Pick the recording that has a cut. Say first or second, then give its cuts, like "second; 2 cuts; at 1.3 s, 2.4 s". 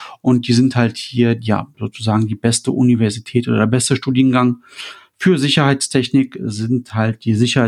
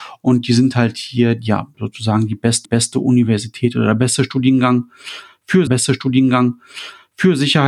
second; 2 cuts; at 2.6 s, 5.7 s